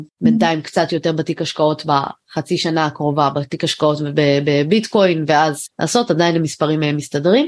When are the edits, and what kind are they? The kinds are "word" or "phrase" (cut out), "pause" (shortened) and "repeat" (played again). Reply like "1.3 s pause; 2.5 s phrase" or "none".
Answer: none